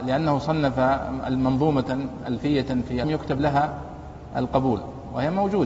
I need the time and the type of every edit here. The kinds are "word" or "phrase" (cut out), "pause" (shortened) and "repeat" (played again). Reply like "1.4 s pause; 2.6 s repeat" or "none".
3.0 s phrase